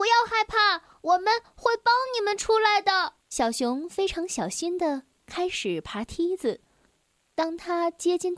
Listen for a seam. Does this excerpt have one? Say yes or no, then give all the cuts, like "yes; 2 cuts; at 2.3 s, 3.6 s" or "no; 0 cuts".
yes; 1 cut; at 3.2 s